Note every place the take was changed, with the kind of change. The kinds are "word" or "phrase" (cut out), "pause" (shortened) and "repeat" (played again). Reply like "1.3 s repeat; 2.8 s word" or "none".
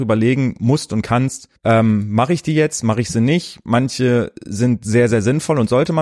1.6 s pause